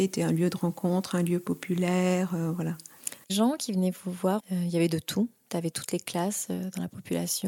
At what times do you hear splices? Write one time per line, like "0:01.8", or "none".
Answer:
0:03.3
0:04.4